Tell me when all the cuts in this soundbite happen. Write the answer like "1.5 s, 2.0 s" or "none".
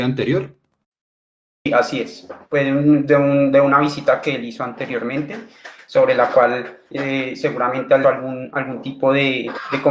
2.4 s, 6.9 s, 8.0 s